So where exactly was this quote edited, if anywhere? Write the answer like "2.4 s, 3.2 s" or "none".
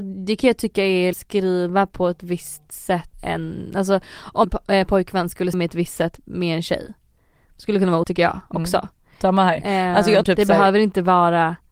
1.1 s, 3.1 s, 4.4 s, 5.5 s, 8.0 s, 10.2 s